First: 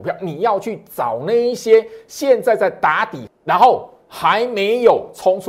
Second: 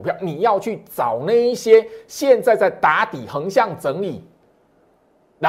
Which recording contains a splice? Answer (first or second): first